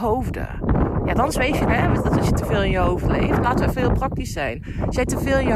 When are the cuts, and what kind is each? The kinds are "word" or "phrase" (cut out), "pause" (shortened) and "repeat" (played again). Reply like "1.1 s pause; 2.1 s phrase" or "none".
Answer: 1.7 s word